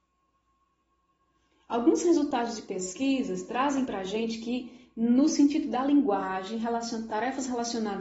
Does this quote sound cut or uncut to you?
uncut